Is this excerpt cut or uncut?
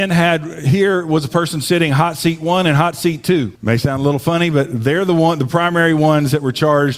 cut